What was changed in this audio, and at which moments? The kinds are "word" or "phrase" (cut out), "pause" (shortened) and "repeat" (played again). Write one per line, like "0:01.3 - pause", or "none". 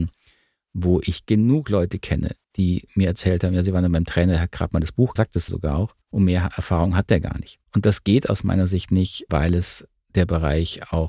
0:02.4 - pause
0:05.2 - phrase
0:05.5 - word
0:06.0 - pause
0:07.6 - pause
0:09.3 - word